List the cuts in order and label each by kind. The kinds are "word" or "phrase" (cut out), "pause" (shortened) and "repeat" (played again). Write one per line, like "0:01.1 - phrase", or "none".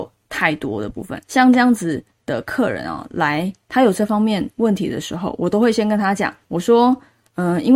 0:01.2 - pause
0:06.4 - pause